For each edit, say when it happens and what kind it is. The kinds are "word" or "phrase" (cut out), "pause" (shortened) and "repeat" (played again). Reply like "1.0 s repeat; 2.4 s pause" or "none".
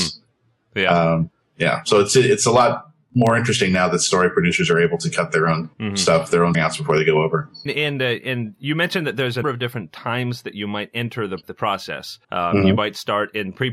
5.7 s pause; 6.5 s word; 7.7 s word; 9.4 s word; 11.4 s word; 12.2 s pause